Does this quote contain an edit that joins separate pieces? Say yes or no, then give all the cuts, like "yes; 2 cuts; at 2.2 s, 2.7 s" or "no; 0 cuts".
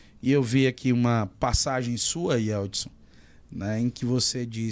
no; 0 cuts